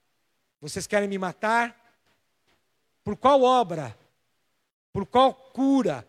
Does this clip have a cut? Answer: no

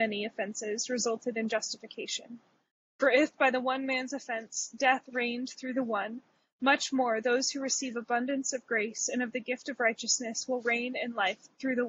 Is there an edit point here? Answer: no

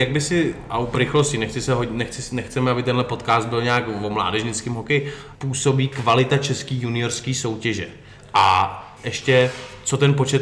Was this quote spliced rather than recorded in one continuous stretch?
yes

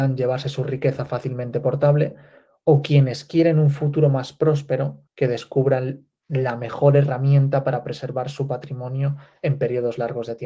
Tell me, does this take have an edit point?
yes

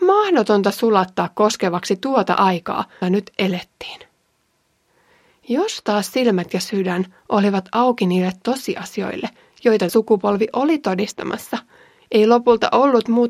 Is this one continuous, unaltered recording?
no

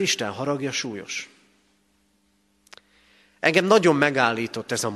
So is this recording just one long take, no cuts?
yes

